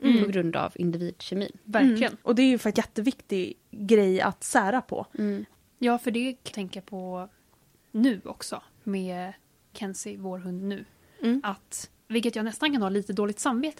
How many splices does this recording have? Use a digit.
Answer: 6